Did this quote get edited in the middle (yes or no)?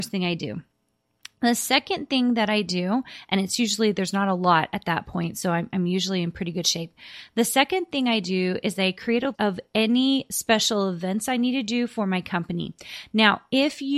yes